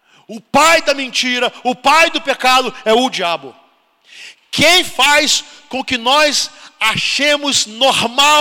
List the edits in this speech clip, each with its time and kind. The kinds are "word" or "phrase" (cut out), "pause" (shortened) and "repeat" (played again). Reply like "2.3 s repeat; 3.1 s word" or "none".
none